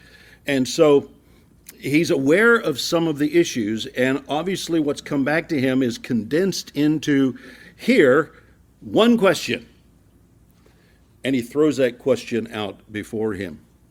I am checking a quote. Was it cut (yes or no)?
no